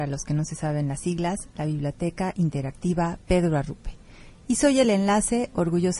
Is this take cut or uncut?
uncut